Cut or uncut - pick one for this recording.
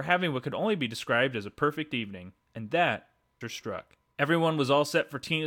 cut